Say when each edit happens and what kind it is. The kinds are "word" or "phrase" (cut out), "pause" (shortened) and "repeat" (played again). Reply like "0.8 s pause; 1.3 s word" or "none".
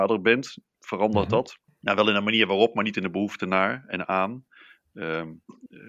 1.7 s pause